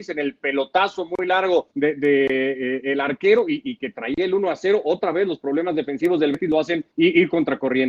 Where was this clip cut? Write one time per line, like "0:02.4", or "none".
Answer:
0:01.7
0:06.9